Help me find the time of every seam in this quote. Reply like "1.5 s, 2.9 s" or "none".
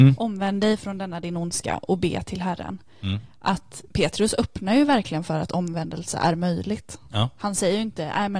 3.9 s